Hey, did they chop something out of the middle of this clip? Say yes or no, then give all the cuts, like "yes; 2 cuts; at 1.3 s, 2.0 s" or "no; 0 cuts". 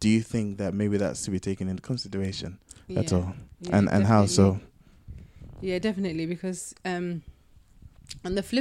no; 0 cuts